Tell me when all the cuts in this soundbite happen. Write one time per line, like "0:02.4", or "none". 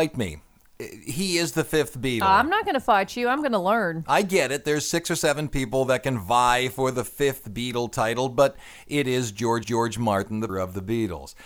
0:09.6
0:10.5